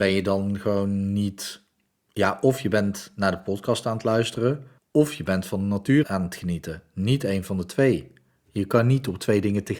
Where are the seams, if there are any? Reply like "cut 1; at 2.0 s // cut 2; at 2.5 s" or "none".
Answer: cut 1; at 1.9 s // cut 2; at 4.8 s // cut 3; at 6.0 s